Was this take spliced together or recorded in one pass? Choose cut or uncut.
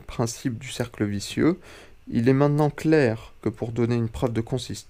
uncut